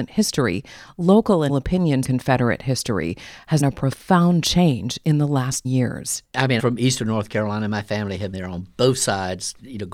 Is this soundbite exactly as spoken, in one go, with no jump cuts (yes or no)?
no